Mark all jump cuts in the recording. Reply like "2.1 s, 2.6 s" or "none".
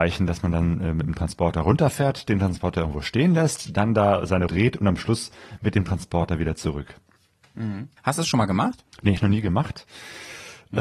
4.5 s, 8.0 s, 9.2 s